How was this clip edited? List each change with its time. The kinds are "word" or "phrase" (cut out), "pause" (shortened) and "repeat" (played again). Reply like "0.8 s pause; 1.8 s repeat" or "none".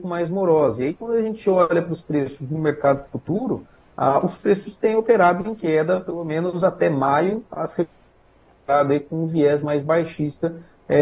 none